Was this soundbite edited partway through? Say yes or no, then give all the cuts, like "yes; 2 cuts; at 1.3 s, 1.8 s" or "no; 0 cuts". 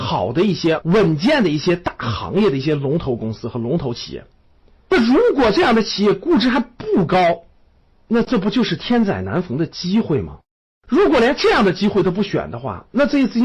no; 0 cuts